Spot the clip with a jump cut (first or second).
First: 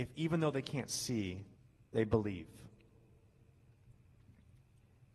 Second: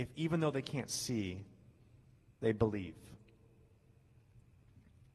first